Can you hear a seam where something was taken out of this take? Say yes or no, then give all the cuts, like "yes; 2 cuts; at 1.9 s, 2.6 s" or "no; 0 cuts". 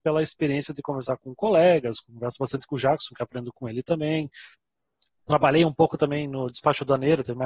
no; 0 cuts